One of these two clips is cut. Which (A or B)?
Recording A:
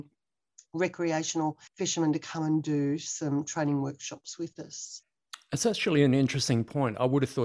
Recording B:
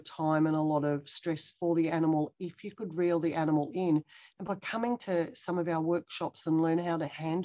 A